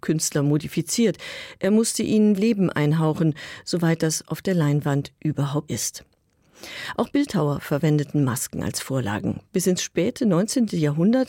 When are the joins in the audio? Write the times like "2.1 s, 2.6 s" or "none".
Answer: 2.4 s, 5.7 s